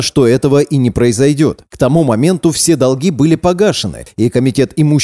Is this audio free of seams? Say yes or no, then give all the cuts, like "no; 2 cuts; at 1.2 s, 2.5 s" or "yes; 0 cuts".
yes; 0 cuts